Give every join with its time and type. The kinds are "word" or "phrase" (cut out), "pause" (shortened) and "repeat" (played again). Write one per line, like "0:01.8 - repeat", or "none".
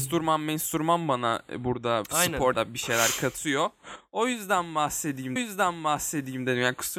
0:02.5 - word
0:05.4 - repeat